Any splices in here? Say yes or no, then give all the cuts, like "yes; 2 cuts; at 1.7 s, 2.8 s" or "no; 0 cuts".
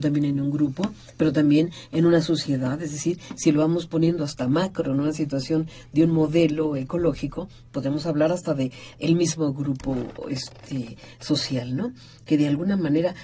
no; 0 cuts